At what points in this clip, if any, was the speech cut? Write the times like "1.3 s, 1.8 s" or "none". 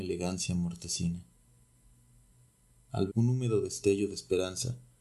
3.1 s